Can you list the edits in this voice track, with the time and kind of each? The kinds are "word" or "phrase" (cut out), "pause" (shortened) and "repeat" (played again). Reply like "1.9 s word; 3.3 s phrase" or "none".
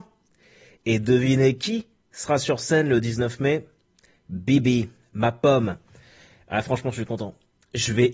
none